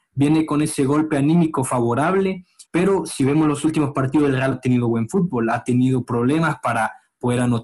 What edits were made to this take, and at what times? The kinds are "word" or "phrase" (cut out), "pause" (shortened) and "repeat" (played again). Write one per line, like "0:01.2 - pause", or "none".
0:02.6 - pause
0:04.5 - phrase